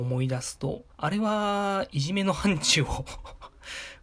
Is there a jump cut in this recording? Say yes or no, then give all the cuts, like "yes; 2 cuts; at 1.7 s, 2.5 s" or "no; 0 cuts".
yes; 1 cut; at 0.9 s